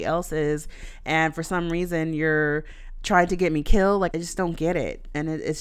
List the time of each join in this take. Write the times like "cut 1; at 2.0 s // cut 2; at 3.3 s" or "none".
cut 1; at 4.1 s